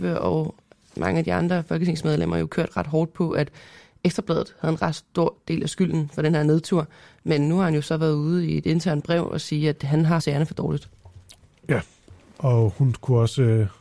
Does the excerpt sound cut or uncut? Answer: cut